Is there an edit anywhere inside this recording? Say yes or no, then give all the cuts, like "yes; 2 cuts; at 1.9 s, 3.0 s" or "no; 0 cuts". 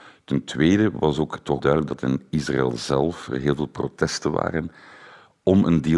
yes; 1 cut; at 1.6 s